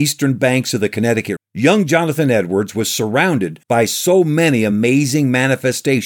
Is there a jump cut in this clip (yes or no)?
yes